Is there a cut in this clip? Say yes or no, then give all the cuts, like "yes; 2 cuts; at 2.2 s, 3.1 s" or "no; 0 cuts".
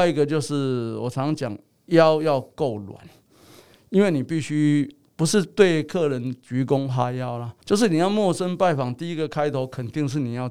yes; 1 cut; at 7.6 s